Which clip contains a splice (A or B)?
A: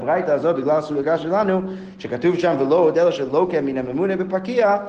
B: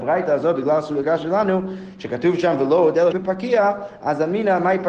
B